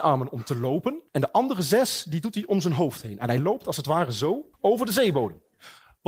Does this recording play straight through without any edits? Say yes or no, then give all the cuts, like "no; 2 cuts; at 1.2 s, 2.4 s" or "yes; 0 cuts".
no; 2 cuts; at 1.1 s, 4.5 s